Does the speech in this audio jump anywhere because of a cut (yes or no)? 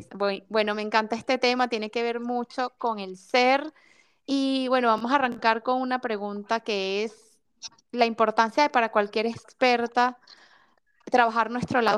no